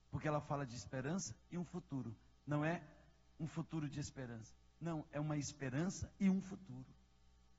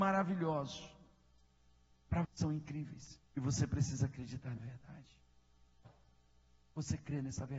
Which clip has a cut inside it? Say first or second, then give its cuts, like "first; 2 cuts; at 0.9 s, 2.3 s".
second; 3 cuts; at 2.2 s, 3.3 s, 4.6 s